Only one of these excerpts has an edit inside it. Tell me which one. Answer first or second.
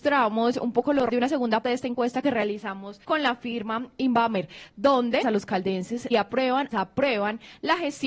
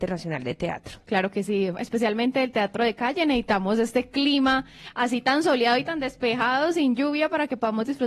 first